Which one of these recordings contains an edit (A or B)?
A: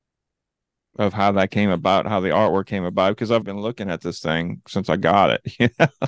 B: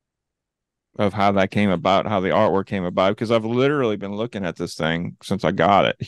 A